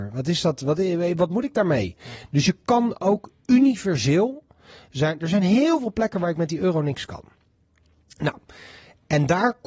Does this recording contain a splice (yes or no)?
no